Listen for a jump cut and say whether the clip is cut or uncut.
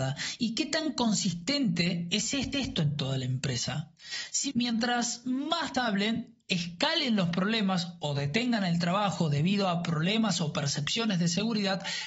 cut